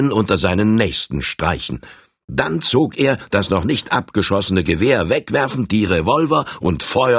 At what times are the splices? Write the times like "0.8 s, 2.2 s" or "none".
none